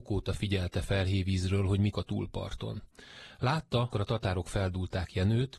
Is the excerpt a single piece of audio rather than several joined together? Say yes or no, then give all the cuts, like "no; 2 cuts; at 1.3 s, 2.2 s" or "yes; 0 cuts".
no; 2 cuts; at 1.9 s, 3.9 s